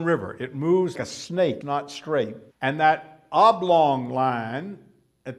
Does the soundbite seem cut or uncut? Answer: cut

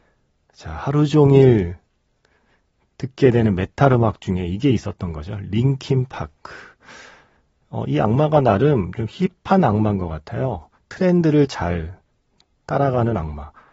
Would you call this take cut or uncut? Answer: uncut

